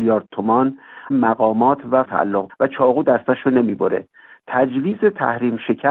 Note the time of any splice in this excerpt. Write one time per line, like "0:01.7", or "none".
0:01.1
0:02.0
0:02.5